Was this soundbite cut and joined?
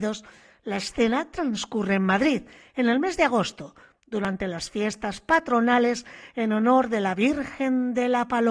no; 0 cuts

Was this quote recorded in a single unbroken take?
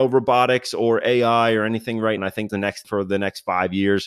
no; 3 cuts; at 2.2 s, 2.5 s, 2.8 s

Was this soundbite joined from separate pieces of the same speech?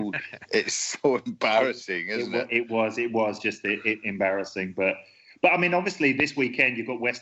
no; 0 cuts

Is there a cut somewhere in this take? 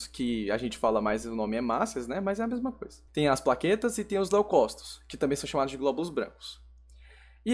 yes; 1 cut; at 3.1 s

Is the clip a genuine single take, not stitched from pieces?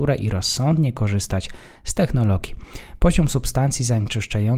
yes; 0 cuts

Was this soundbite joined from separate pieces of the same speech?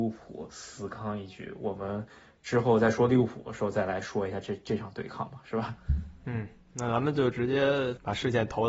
no; 0 cuts

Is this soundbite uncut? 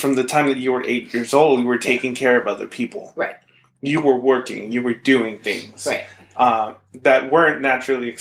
yes; 0 cuts

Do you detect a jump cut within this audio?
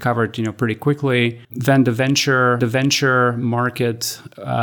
yes; 2 cuts; at 1.4 s, 2.6 s

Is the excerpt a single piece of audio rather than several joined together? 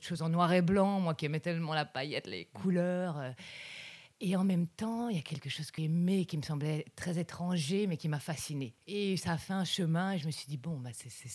no; 1 cut; at 5.8 s

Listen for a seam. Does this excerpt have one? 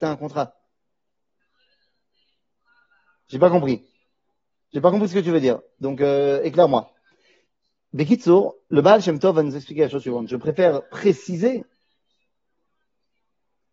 no; 0 cuts

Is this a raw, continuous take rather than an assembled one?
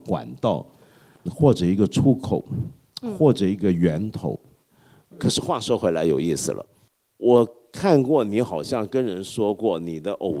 no; 1 cut; at 1.3 s

